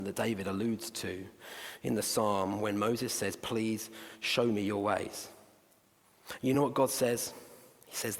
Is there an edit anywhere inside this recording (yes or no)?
no